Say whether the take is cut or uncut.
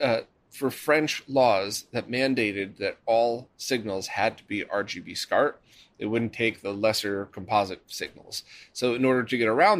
uncut